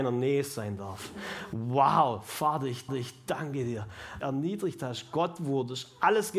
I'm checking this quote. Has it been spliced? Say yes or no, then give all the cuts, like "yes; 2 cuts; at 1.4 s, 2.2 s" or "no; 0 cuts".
yes; 2 cuts; at 2.9 s, 4.2 s